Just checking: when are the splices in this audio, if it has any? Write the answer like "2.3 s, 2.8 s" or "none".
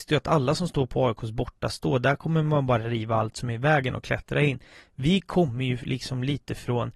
none